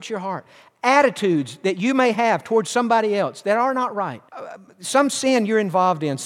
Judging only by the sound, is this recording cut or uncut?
cut